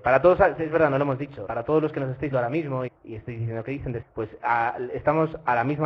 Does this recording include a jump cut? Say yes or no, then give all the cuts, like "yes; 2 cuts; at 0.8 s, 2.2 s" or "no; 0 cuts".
yes; 4 cuts; at 1.5 s, 2.3 s, 2.9 s, 4.0 s